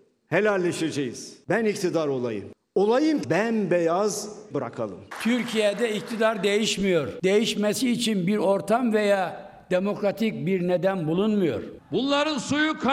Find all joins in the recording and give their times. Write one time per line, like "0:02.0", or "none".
0:03.2
0:04.5